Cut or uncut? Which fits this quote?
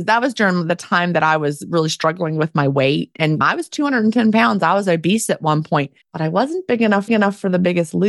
cut